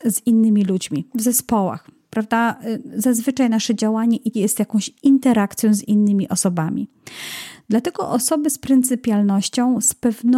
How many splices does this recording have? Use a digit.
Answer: 1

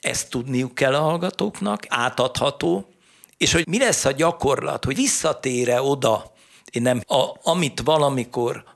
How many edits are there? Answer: 4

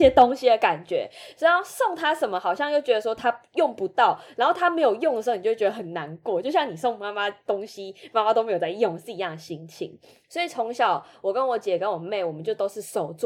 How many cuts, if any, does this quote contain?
0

